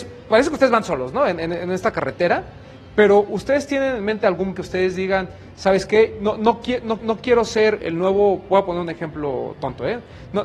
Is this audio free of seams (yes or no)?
no